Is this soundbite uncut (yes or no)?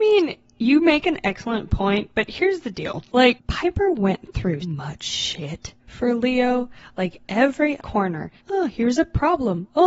no